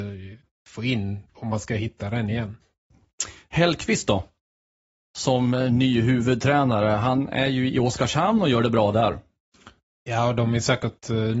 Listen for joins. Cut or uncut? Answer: cut